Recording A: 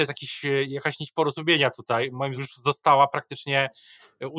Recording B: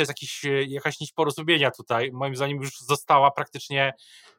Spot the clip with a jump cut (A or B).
A